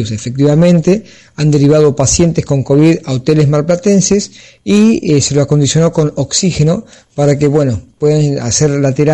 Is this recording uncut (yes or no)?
yes